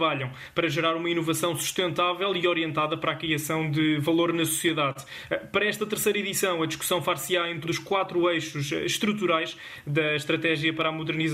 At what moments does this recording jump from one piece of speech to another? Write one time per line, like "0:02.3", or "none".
0:07.6